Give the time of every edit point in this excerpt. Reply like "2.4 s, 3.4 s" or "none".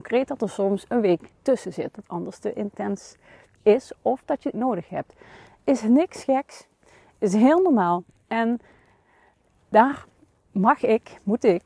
1.9 s, 4.5 s